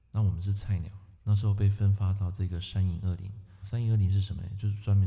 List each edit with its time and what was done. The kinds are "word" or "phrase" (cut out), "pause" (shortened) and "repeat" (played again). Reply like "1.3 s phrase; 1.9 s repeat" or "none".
1.1 s pause; 3.6 s word